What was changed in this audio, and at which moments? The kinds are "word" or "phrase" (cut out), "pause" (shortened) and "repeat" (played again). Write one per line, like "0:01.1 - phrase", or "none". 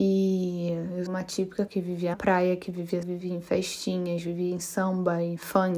0:01.1 - word
0:01.7 - word
0:02.1 - word
0:03.0 - word